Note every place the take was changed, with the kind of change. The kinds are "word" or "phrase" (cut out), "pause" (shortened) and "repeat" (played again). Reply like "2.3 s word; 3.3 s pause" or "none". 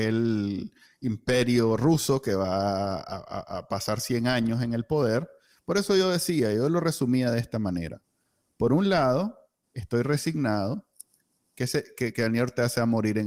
none